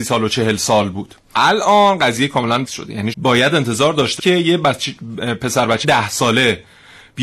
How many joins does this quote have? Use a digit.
5